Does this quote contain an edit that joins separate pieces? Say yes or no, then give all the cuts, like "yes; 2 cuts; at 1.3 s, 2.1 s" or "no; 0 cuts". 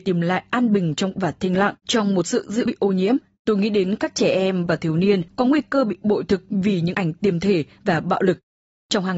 yes; 5 cuts; at 1.1 s, 1.8 s, 2.7 s, 5.3 s, 6.9 s